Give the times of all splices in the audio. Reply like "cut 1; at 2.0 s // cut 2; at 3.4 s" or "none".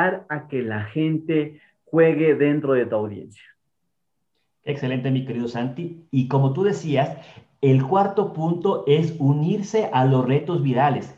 none